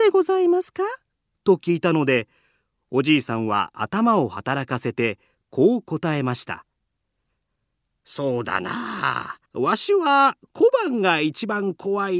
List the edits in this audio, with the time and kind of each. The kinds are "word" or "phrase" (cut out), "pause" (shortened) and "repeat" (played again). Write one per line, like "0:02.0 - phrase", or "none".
0:01.1 - pause
0:09.5 - pause